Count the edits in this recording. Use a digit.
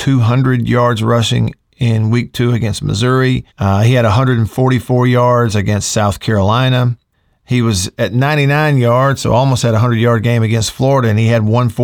2